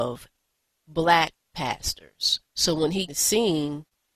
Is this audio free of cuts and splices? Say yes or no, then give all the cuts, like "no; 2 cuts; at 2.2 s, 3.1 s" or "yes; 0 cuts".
no; 2 cuts; at 2.4 s, 3.1 s